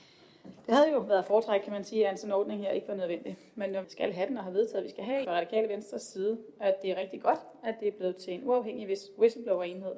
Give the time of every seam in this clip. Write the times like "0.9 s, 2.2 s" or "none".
3.8 s, 5.2 s